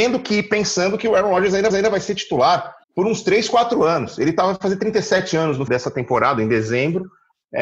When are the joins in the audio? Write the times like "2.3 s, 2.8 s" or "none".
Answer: 1.7 s, 2.8 s, 5.7 s